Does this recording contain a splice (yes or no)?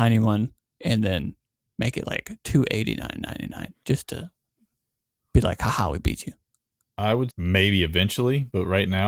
yes